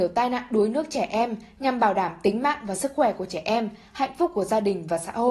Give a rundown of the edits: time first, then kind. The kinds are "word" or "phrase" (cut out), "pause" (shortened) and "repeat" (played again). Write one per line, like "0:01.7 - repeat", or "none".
none